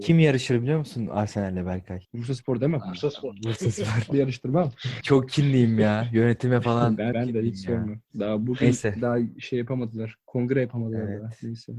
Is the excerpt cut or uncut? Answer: cut